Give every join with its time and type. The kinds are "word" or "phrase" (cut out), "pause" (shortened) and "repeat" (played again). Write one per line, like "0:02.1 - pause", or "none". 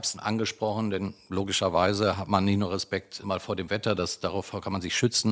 none